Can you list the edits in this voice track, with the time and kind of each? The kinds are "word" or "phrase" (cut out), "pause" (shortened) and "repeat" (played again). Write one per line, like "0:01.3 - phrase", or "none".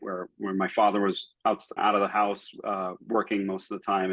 0:01.8 - phrase